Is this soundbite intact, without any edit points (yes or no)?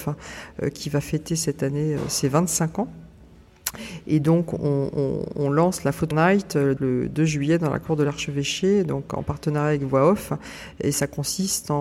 no